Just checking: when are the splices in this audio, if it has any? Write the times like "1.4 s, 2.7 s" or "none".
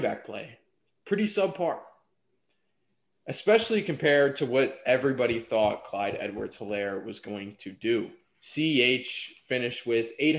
none